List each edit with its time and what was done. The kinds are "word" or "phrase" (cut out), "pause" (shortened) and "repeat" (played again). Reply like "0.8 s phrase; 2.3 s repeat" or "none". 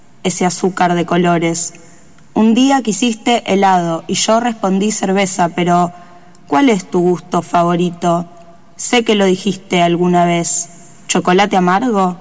none